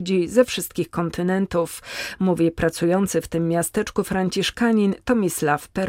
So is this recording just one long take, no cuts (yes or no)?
yes